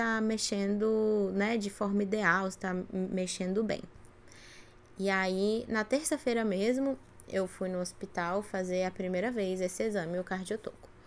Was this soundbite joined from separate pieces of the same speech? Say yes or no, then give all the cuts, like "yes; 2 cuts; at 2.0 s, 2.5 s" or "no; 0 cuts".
no; 0 cuts